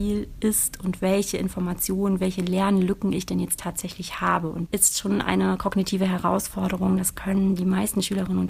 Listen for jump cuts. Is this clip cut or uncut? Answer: cut